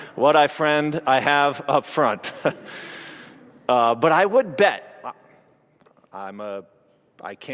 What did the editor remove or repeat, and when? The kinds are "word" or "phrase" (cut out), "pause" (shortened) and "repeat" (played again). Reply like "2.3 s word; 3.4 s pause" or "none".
none